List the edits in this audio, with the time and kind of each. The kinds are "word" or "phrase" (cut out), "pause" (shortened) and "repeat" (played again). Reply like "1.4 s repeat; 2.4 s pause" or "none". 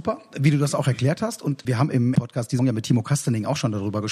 1.6 s word; 2.1 s word; 2.6 s word